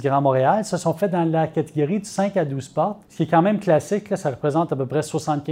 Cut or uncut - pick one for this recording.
cut